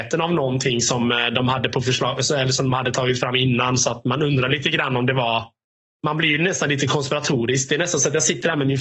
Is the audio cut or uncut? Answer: cut